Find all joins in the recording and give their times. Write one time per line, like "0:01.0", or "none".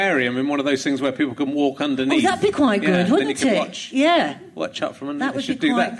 none